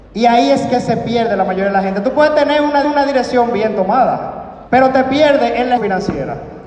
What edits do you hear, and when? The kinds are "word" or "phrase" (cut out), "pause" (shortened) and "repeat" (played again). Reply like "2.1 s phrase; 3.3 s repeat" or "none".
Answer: 2.8 s repeat; 4.7 s pause; 5.8 s word